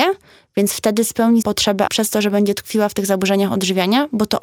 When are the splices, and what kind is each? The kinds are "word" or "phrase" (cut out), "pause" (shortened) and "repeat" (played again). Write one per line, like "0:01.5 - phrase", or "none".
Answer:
0:01.4 - word
0:01.9 - word